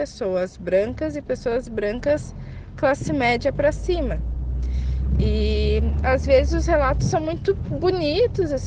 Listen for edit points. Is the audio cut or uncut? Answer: uncut